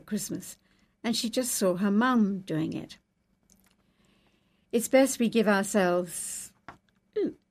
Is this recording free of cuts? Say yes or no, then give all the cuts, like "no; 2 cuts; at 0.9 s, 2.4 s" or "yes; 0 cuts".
yes; 0 cuts